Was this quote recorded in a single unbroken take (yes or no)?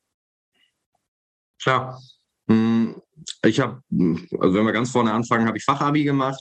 yes